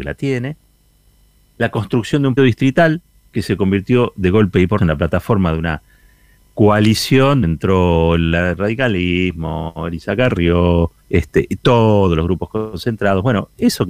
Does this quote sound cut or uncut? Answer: cut